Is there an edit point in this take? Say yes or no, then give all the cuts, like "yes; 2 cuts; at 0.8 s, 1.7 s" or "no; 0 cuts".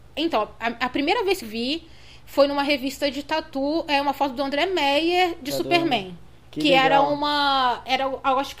yes; 1 cut; at 1.4 s